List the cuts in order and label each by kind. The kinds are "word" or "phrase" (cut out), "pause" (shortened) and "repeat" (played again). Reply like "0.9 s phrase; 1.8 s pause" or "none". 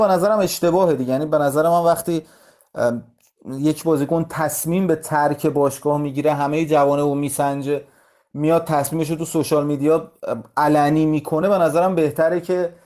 none